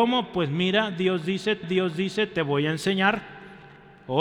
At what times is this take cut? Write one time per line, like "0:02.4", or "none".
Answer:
0:01.6